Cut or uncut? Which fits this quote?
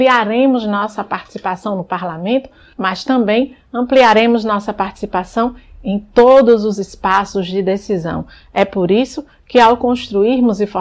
uncut